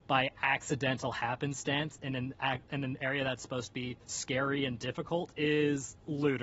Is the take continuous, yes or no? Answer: yes